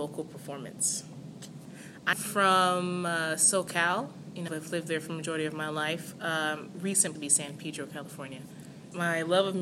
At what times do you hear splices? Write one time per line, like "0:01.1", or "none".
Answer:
0:02.1
0:04.5
0:07.1